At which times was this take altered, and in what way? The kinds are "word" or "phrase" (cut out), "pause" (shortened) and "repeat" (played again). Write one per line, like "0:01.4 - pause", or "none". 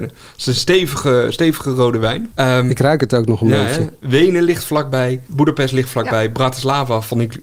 0:05.3 - pause